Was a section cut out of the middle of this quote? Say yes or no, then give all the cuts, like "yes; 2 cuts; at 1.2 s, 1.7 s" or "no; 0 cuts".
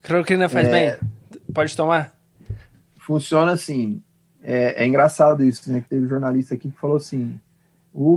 no; 0 cuts